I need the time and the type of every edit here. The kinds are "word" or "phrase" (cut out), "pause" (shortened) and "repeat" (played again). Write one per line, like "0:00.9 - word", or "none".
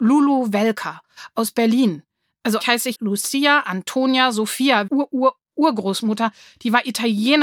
0:02.6 - word
0:02.9 - word
0:04.9 - phrase